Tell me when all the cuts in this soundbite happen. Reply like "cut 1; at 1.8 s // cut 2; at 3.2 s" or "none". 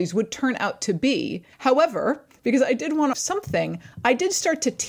cut 1; at 1.5 s // cut 2; at 3.1 s